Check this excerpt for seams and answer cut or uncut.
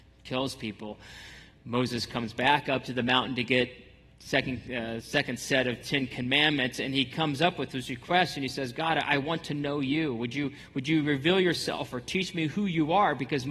uncut